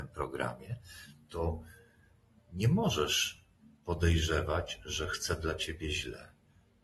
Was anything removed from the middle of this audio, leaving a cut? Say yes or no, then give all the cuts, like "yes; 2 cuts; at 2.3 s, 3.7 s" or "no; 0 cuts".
no; 0 cuts